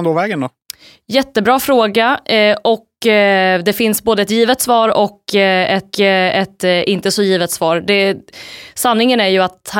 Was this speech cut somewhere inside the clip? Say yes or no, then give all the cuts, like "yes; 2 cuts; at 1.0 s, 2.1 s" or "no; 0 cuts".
yes; 1 cut; at 5.9 s